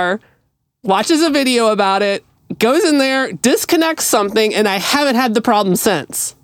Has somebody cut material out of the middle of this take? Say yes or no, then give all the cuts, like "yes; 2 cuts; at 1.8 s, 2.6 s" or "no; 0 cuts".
no; 0 cuts